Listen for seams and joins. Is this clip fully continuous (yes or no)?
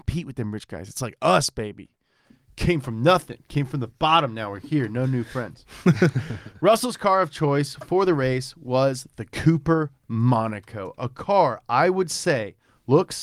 yes